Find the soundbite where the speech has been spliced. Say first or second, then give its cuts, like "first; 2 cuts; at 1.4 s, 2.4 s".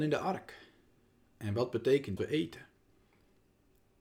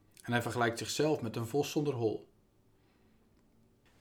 first; 1 cut; at 2.2 s